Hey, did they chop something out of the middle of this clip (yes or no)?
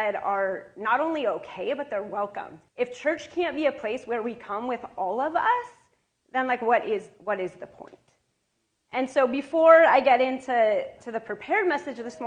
yes